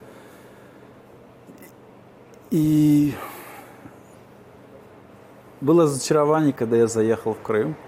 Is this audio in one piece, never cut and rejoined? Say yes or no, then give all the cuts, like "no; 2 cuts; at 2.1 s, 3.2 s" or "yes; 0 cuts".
yes; 0 cuts